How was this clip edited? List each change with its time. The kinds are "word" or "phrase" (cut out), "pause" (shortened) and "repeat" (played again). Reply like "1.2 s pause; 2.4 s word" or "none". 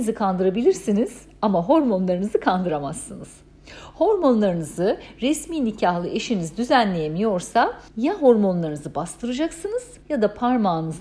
7.9 s pause; 10.0 s pause